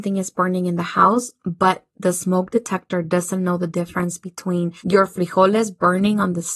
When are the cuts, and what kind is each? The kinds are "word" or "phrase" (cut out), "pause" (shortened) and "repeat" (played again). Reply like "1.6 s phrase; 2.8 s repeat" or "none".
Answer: 4.8 s pause